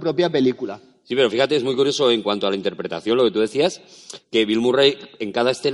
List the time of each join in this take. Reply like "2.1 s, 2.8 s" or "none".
none